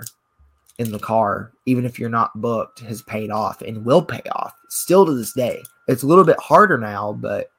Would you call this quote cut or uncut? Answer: cut